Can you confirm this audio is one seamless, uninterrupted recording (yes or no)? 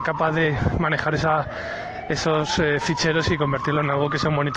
yes